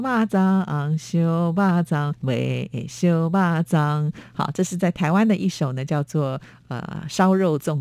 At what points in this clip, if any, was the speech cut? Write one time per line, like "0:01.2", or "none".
0:02.1